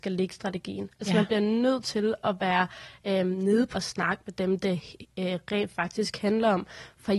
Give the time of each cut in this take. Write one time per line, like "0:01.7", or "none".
0:03.7